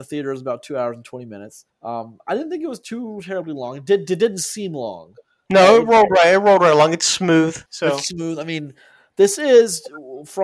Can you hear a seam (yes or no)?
yes